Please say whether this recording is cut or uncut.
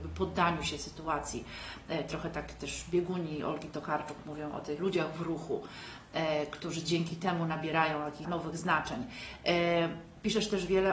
cut